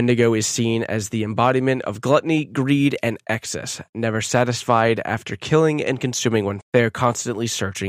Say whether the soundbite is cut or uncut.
cut